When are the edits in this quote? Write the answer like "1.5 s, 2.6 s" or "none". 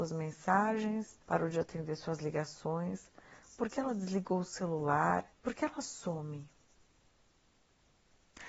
1.2 s, 5.3 s